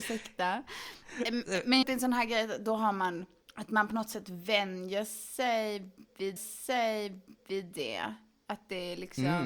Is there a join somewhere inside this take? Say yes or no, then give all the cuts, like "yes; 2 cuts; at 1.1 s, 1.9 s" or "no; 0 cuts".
yes; 2 cuts; at 1.8 s, 6.4 s